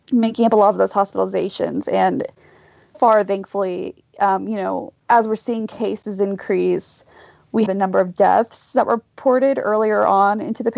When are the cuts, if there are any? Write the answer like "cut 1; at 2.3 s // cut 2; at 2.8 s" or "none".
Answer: cut 1; at 2.9 s // cut 2; at 5.0 s // cut 3; at 7.7 s